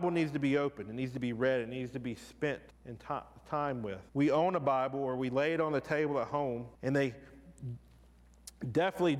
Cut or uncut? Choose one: cut